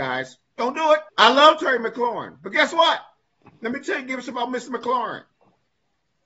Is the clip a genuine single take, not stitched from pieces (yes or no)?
no